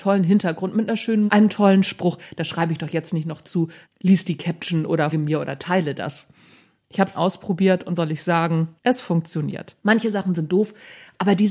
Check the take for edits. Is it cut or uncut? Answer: cut